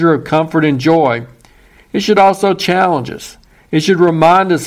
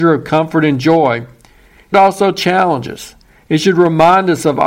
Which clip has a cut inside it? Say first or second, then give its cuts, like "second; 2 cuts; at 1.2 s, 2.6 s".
second; 1 cut; at 1.9 s